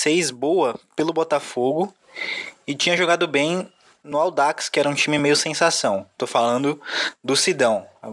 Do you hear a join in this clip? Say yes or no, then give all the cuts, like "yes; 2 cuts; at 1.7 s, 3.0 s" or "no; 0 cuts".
no; 0 cuts